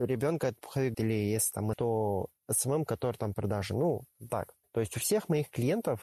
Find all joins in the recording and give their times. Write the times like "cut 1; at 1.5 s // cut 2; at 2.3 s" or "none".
cut 1; at 0.9 s // cut 2; at 1.7 s // cut 3; at 3.3 s // cut 4; at 4.3 s